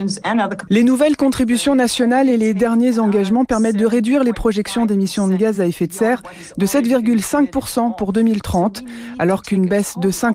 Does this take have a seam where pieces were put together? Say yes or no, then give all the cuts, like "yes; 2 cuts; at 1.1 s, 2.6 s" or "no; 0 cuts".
no; 0 cuts